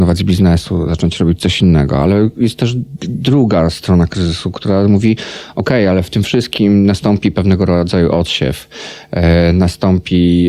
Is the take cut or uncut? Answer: uncut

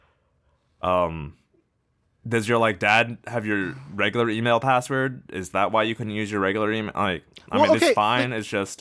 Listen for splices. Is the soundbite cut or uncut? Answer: uncut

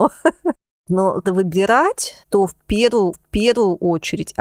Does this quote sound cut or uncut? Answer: cut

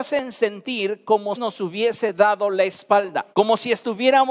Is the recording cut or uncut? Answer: cut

